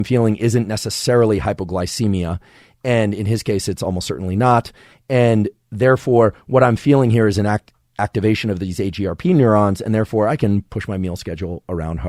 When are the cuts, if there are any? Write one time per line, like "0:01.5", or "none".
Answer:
none